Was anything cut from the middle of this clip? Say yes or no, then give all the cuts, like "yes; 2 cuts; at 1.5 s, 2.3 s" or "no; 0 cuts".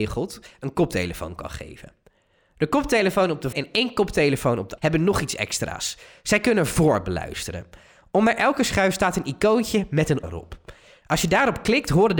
yes; 3 cuts; at 3.5 s, 4.8 s, 10.2 s